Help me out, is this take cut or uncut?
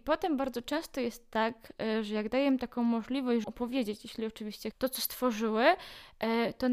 cut